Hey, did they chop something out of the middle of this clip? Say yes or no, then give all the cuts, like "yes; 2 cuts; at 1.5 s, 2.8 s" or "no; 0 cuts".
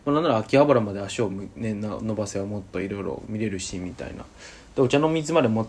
no; 0 cuts